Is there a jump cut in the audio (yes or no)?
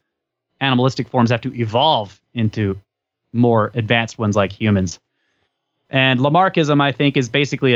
no